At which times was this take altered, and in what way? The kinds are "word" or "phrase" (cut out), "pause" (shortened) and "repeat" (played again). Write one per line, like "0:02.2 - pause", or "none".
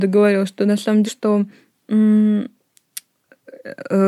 0:01.1 - word